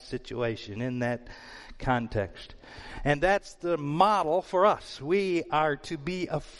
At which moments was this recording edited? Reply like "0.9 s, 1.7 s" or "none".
none